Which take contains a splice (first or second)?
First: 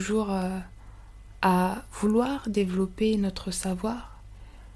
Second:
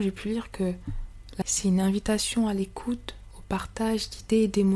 second